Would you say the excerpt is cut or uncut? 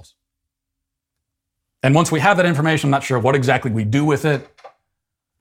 uncut